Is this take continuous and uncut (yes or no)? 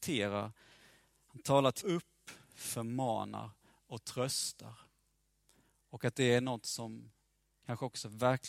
no